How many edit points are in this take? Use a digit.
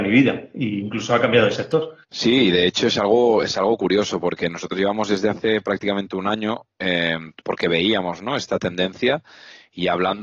1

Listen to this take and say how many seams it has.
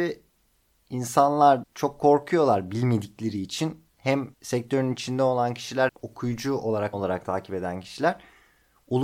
4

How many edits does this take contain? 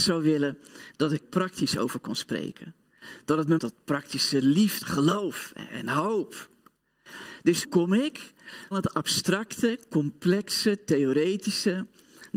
5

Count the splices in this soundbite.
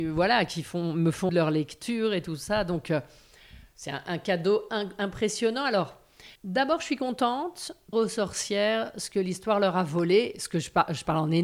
3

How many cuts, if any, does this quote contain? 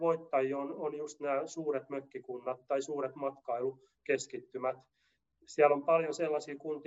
0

